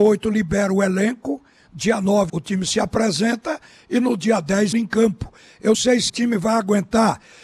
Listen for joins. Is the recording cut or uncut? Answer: cut